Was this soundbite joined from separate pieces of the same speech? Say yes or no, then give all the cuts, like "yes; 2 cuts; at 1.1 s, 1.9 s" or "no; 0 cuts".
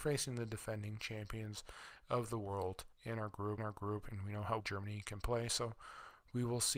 yes; 3 cuts; at 2.9 s, 3.6 s, 4.6 s